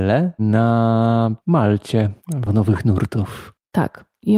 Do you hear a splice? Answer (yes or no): yes